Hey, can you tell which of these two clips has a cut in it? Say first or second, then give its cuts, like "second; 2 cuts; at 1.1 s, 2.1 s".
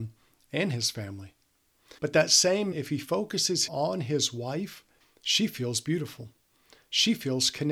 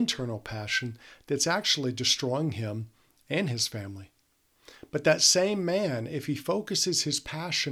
first; 4 cuts; at 2.0 s, 2.7 s, 3.7 s, 5.0 s